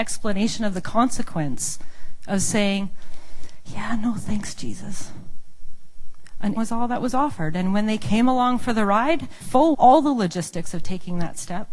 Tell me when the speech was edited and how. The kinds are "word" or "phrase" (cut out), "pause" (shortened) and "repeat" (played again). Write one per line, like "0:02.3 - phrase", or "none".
0:06.6 - word
0:09.4 - word
0:09.7 - word